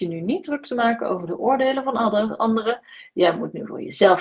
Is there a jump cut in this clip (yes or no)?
no